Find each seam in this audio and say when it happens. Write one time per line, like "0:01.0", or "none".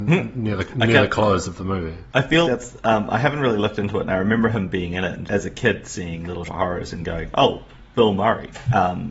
0:02.4
0:05.3
0:06.5